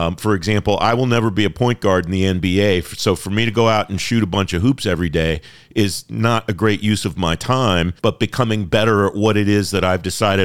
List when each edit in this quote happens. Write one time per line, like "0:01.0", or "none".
0:08.0